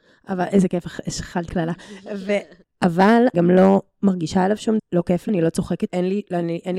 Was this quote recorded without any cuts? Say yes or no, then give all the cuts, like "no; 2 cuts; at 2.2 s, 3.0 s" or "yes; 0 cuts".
no; 5 cuts; at 1.5 s, 3.3 s, 4.8 s, 5.3 s, 5.9 s